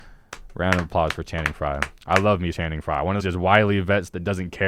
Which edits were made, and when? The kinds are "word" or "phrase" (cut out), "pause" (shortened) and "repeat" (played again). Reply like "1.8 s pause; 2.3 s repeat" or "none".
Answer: 2.5 s word; 3.2 s word